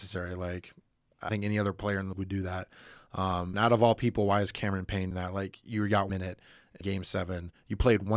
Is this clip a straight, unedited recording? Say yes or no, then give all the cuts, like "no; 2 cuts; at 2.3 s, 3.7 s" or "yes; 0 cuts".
no; 6 cuts; at 1.3 s, 2.1 s, 3.5 s, 5.1 s, 6.1 s, 6.8 s